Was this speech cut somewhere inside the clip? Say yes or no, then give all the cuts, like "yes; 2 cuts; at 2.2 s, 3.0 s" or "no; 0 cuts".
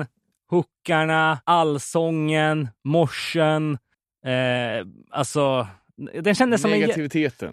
yes; 2 cuts; at 1.4 s, 3.9 s